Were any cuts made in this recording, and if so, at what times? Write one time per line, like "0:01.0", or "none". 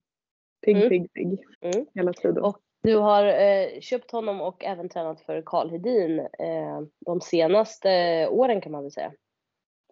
0:01.5
0:02.7
0:06.9